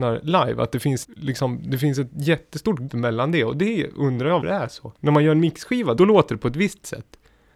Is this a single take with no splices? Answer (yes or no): no